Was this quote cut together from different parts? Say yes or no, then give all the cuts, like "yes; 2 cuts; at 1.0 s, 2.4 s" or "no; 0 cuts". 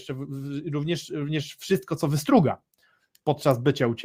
no; 0 cuts